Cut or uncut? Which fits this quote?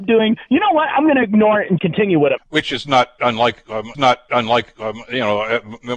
cut